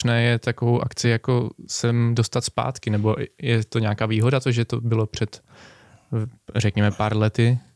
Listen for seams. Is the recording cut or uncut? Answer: uncut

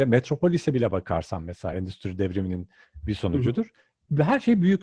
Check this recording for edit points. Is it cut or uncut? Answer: uncut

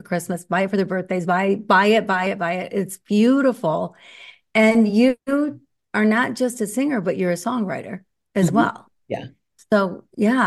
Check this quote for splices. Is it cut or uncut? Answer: uncut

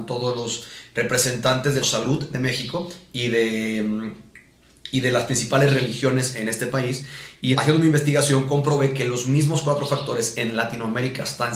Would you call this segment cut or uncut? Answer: cut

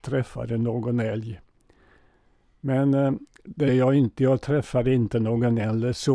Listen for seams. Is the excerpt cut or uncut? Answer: cut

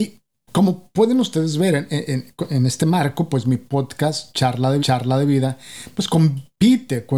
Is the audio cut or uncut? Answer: cut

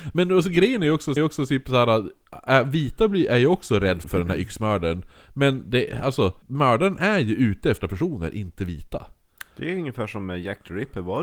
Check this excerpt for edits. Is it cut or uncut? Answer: cut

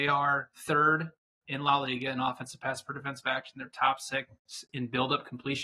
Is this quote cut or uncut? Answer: uncut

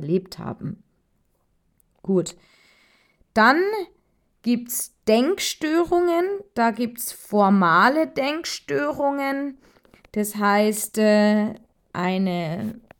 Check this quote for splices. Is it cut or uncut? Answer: uncut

